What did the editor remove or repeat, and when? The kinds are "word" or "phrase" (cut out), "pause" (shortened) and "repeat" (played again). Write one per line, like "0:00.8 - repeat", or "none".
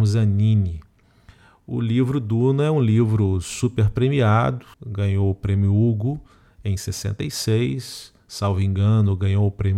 0:04.7 - pause

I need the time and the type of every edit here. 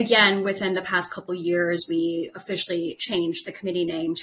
none

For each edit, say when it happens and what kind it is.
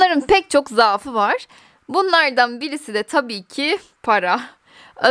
none

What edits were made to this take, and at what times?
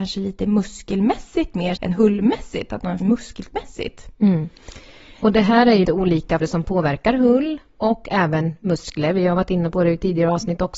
0:01.8 - word
0:03.0 - word
0:05.8 - word
0:06.4 - word

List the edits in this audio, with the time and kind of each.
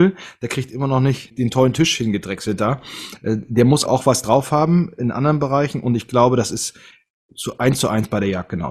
0:03.9 - word

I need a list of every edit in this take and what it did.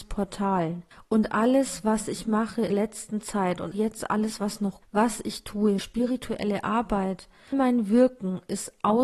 0:00.9 - pause
0:02.7 - word
0:03.7 - word
0:04.8 - word
0:05.8 - word
0:07.5 - word

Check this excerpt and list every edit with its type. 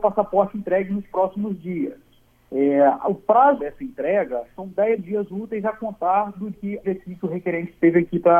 0:02.3 - pause
0:03.6 - word
0:06.5 - word
0:06.8 - phrase

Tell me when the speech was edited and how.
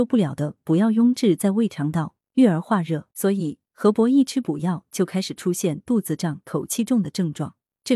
0:03.1 - pause

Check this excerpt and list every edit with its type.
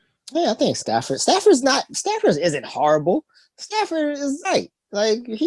0:04.4 - word

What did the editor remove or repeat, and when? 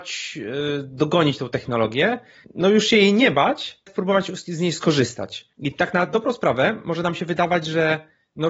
0:02.4 - phrase
0:03.9 - word
0:05.5 - pause

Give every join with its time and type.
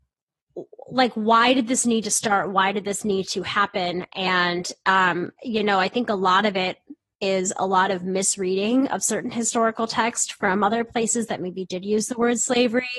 none

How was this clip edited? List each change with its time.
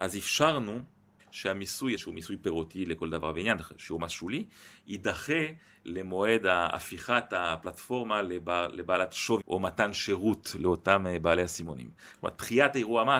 0:01.2 - phrase
0:02.0 - phrase
0:09.4 - word

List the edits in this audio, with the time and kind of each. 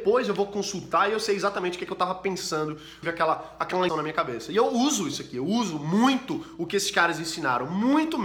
0:03.0 - phrase
0:03.9 - word

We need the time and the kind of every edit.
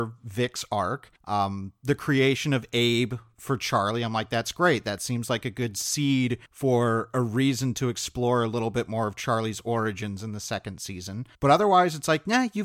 0:01.2 - pause
0:06.5 - pause
0:11.3 - pause

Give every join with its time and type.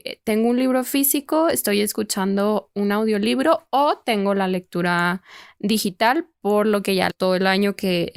0:07.1 - phrase

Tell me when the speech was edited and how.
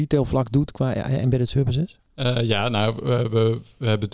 0:02.1 - pause

